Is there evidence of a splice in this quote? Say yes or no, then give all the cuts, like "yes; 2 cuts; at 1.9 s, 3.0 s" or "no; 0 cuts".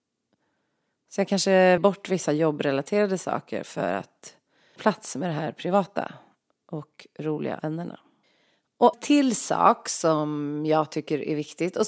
yes; 4 cuts; at 1.8 s, 4.8 s, 7.6 s, 8.9 s